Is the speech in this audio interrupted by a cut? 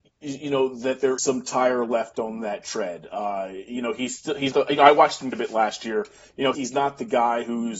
yes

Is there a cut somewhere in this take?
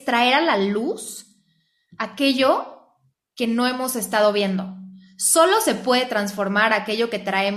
no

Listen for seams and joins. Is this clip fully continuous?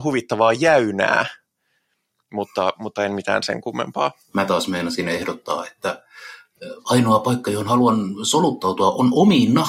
yes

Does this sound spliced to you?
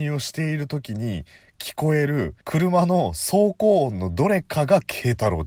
yes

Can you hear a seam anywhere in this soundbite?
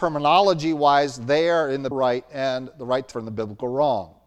yes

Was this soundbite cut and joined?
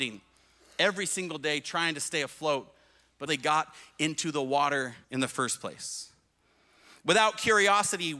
yes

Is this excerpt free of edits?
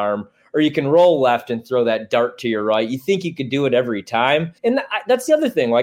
no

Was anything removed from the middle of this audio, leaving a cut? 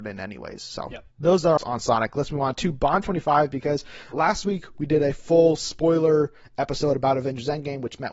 yes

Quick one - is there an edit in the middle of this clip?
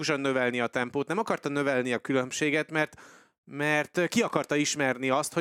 no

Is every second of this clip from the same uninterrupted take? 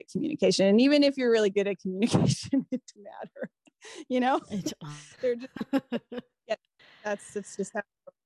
no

